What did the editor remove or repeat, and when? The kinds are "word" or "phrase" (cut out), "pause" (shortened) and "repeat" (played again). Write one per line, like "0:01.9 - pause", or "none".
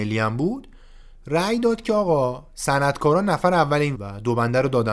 0:04.0 - word

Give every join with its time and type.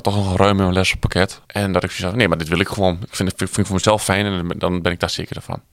0:01.4 - pause

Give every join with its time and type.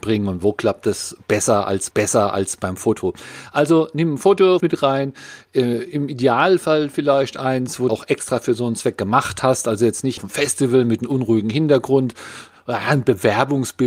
0:01.9 - repeat
0:04.6 - phrase
0:07.9 - word
0:10.2 - word

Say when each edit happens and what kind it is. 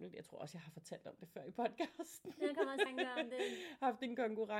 0:02.9 - word

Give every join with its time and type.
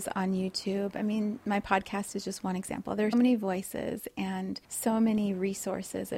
0:03.1 - word
0:04.6 - pause

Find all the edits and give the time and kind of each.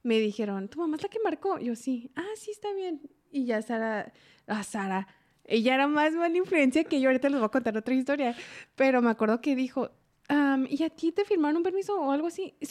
none

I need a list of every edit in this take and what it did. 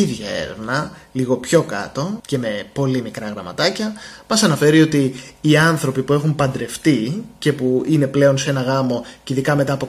none

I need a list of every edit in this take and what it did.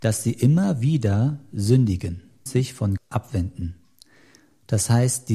0:02.5 - word
0:03.0 - word

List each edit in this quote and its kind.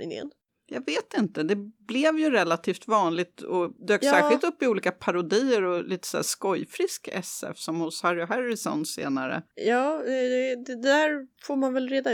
0:03.8 - pause

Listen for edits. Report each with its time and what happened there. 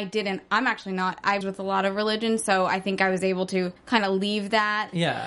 0:01.4 - phrase
0:03.8 - pause

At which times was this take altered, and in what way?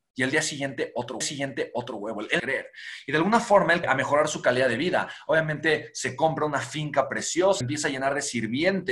0:01.2 - repeat
0:02.4 - phrase
0:03.8 - word
0:07.6 - word

